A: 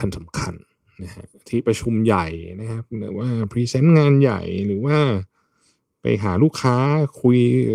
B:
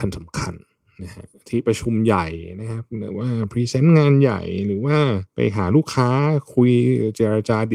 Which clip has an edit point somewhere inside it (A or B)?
B